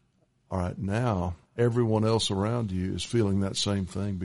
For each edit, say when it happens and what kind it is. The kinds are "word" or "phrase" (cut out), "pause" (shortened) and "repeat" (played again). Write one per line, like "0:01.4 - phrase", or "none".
0:01.5 - pause